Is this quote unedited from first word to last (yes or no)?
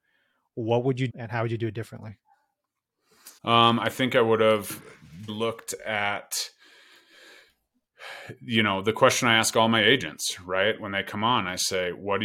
no